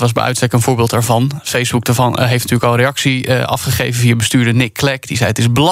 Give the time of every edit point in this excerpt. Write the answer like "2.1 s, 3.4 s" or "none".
none